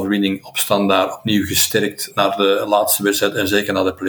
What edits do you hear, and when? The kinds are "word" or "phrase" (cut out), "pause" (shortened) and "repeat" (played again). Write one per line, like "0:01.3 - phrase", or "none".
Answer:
0:02.1 - word